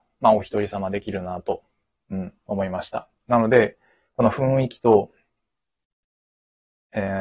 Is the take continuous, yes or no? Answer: yes